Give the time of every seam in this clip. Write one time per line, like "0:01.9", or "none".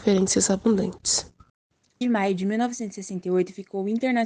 0:02.0